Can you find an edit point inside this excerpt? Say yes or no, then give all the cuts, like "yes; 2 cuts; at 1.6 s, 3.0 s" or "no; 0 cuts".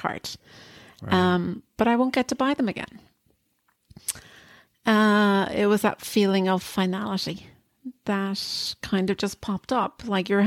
no; 0 cuts